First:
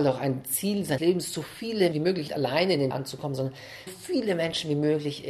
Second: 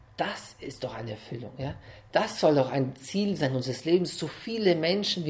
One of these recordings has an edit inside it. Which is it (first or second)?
first